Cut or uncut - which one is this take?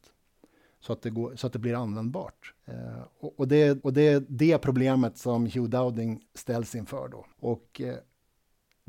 cut